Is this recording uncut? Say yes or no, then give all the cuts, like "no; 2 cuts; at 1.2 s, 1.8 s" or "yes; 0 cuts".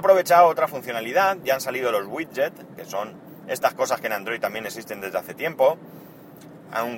yes; 0 cuts